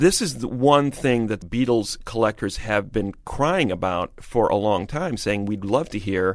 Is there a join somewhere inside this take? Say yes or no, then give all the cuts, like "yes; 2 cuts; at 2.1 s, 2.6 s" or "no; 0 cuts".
yes; 1 cut; at 1.4 s